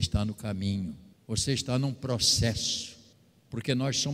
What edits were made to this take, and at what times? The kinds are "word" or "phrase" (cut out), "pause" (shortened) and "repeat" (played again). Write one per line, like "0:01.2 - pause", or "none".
0:01.1 - pause
0:03.1 - pause

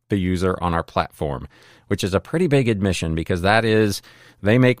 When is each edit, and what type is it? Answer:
none

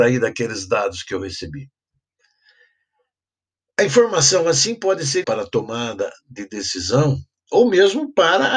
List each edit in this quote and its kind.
0:05.2 - phrase

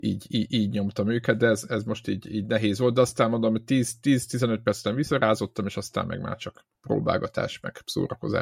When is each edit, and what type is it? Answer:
0:06.7 - pause

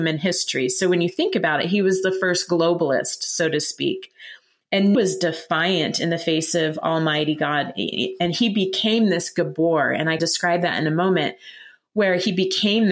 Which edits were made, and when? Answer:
0:04.9 - phrase
0:10.2 - word

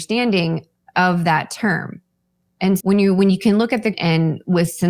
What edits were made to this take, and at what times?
0:02.8 - word
0:03.9 - word

